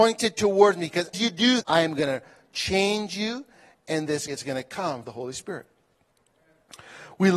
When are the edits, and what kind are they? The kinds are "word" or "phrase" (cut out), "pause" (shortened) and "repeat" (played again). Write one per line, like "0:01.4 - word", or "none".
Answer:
0:01.1 - word
0:01.6 - word
0:04.3 - word
0:05.0 - word